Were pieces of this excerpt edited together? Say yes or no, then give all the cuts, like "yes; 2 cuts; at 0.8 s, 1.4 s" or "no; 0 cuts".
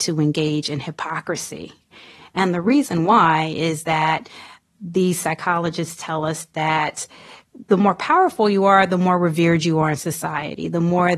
no; 0 cuts